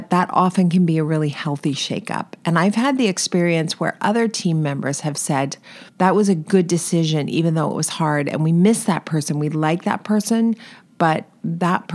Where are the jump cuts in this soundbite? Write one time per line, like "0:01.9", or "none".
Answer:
0:05.9